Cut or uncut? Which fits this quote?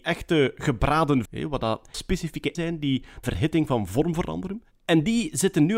cut